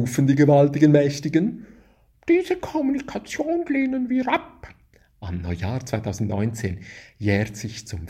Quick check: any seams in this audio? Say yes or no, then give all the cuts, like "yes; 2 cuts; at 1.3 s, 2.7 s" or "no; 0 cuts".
no; 0 cuts